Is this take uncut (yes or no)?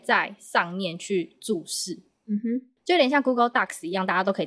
yes